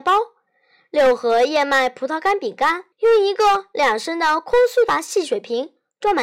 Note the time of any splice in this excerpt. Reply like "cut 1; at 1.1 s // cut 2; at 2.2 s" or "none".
cut 1; at 2.9 s